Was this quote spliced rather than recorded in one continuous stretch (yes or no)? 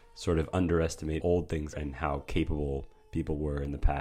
yes